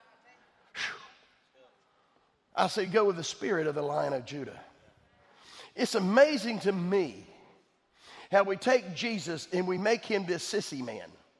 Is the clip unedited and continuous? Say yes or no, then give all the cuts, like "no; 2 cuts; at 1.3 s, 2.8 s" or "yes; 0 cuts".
yes; 0 cuts